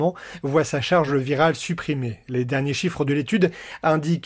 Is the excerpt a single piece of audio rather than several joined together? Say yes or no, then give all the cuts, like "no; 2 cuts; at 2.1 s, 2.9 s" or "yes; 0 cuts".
yes; 0 cuts